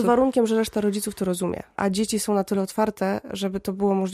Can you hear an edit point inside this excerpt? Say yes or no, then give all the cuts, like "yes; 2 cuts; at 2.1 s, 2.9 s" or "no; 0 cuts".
no; 0 cuts